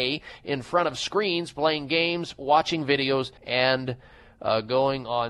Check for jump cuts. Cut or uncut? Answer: cut